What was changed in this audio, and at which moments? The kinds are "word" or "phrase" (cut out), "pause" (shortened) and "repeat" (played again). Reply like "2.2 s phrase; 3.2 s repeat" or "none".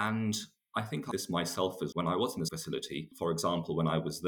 1.1 s word; 1.9 s word; 2.5 s word